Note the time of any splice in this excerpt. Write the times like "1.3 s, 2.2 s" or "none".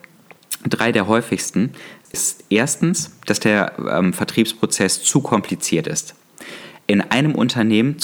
none